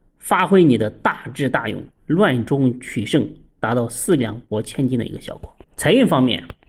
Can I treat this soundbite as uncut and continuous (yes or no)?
no